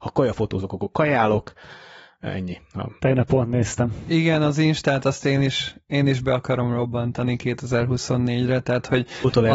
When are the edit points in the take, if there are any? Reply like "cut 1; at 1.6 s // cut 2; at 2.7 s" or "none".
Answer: cut 1; at 3.0 s